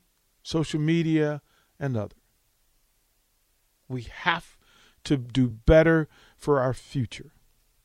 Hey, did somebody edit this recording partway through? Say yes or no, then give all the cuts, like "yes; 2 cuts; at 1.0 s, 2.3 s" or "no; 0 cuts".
no; 0 cuts